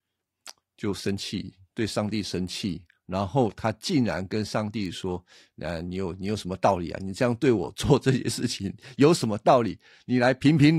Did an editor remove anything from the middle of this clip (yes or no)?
no